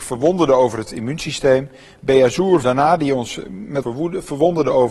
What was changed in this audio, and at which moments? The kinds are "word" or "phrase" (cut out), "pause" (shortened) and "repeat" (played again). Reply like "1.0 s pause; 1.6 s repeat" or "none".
2.6 s word; 3.8 s word